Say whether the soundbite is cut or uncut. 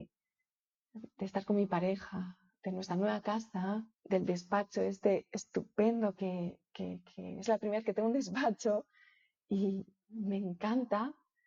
cut